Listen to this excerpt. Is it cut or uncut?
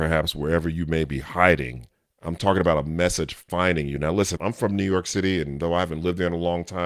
cut